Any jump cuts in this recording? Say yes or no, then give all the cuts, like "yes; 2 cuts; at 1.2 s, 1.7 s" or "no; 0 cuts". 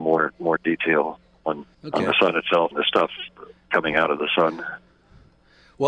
yes; 2 cuts; at 1.7 s, 2.7 s